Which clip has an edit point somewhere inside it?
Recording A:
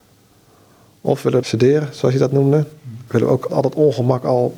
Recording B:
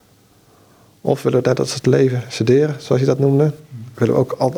A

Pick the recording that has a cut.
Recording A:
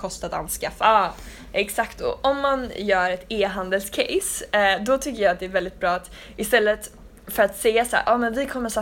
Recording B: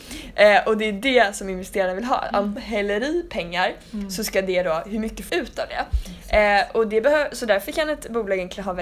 B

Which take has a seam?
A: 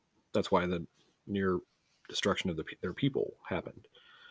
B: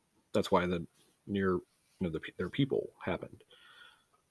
B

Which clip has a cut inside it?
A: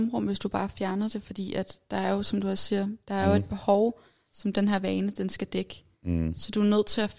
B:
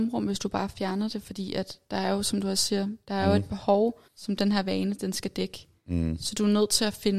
B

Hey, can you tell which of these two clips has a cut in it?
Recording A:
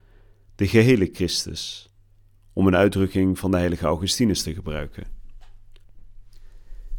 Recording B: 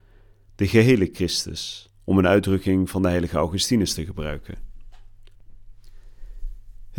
B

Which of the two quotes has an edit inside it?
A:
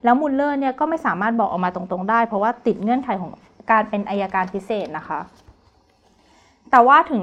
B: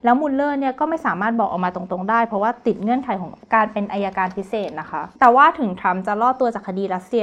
B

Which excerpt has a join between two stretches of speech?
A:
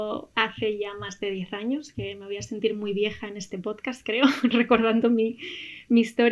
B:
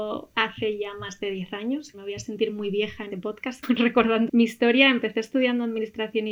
B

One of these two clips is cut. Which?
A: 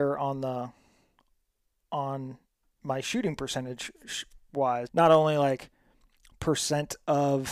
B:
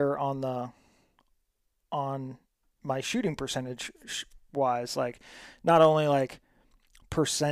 A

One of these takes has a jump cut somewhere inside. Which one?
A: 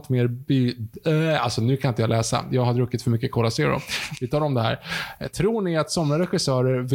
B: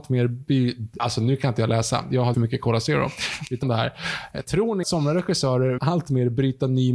B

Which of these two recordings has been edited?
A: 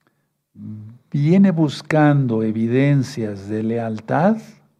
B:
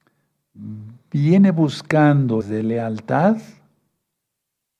B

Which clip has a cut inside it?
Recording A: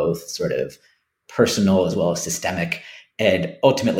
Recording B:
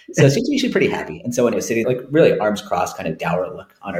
B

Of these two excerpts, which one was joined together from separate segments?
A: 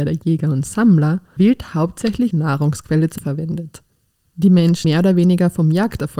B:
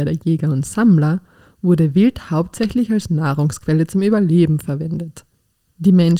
A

